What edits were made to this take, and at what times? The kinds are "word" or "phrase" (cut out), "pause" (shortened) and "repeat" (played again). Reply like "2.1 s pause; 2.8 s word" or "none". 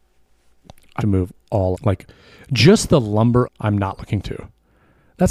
1.0 s word; 1.7 s phrase; 3.4 s word; 4.2 s word